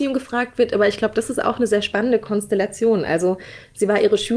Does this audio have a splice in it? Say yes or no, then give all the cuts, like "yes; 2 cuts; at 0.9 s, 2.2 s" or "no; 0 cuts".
no; 0 cuts